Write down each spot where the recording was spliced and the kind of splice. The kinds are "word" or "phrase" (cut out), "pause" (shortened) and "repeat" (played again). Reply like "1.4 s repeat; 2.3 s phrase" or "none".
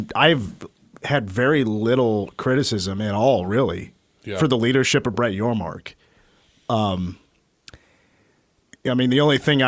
none